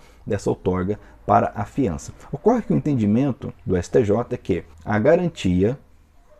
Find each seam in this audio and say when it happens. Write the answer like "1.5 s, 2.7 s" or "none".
3.6 s, 4.7 s